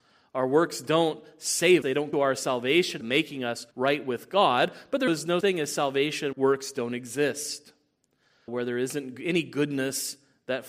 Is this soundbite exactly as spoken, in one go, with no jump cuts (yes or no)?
no